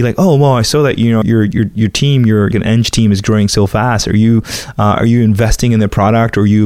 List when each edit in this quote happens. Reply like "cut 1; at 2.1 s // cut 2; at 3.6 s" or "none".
cut 1; at 1.2 s // cut 2; at 2.5 s